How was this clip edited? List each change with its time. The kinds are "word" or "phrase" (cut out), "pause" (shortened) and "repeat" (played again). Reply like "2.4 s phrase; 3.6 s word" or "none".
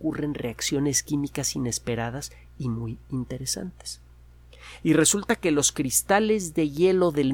none

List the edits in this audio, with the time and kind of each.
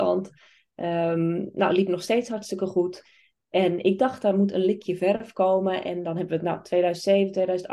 none

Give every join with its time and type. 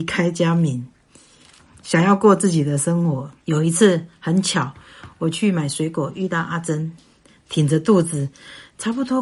3.4 s pause

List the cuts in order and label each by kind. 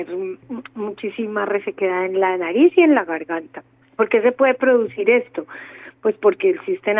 3.8 s pause

